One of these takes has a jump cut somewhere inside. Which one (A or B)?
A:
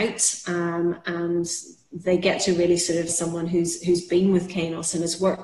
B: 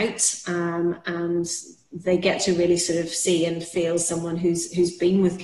A